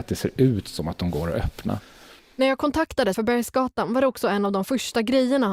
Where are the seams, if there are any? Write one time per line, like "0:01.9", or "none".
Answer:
0:03.1